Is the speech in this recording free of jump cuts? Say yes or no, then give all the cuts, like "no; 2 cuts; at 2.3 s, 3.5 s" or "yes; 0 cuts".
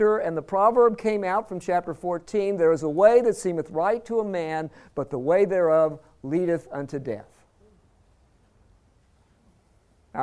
yes; 0 cuts